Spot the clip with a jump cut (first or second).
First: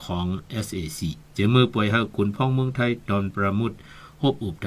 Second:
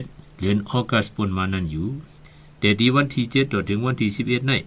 first